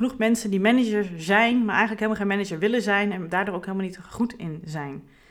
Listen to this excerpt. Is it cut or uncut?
uncut